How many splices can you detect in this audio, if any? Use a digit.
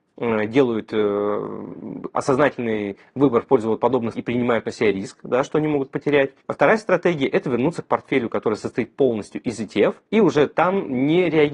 3